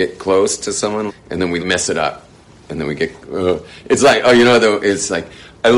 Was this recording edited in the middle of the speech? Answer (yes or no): yes